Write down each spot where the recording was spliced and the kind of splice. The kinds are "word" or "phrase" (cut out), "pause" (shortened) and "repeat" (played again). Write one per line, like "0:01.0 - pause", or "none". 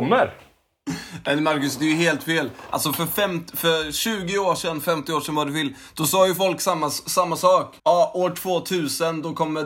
0:07.8 - pause